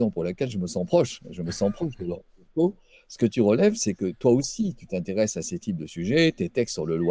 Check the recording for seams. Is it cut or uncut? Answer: uncut